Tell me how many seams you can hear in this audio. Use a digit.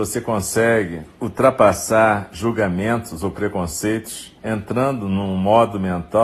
2